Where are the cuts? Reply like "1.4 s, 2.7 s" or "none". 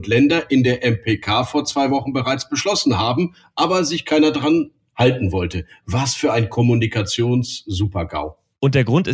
none